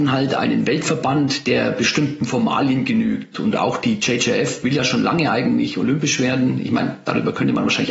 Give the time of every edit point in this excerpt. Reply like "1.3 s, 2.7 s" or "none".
none